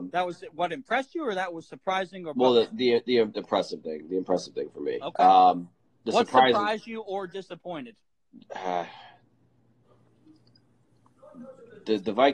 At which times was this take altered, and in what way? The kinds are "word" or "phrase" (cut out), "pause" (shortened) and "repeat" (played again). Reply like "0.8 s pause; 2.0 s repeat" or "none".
none